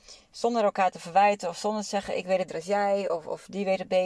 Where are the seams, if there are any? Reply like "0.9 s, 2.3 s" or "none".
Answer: 2.5 s